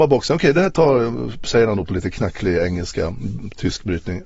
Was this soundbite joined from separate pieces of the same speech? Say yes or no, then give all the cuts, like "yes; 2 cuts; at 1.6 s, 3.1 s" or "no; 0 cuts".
no; 0 cuts